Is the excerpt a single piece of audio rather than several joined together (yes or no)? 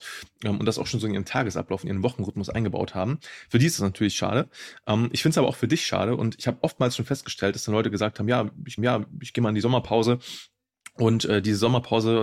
no